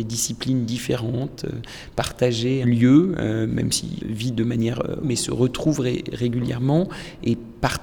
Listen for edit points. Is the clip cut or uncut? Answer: cut